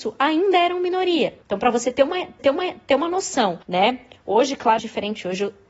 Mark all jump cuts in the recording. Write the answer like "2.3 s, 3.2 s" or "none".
1.4 s, 2.4 s, 3.6 s, 4.8 s